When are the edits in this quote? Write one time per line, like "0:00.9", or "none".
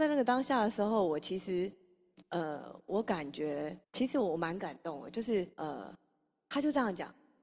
0:03.8
0:05.5